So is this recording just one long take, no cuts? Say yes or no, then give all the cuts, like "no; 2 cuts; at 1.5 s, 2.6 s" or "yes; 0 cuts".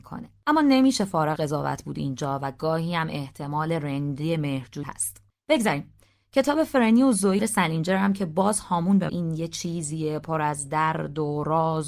no; 4 cuts; at 1.4 s, 4.8 s, 7.4 s, 9.1 s